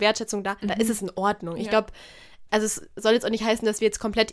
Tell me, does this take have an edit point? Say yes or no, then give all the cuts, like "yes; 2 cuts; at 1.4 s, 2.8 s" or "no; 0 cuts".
no; 0 cuts